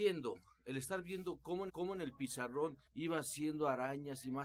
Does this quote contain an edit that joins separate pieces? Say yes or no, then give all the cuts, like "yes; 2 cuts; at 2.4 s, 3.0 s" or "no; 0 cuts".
yes; 2 cuts; at 1.7 s, 2.9 s